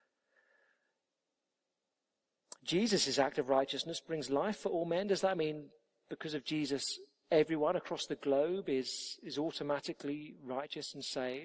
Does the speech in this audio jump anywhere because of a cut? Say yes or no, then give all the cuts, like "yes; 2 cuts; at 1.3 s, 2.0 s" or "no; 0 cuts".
no; 0 cuts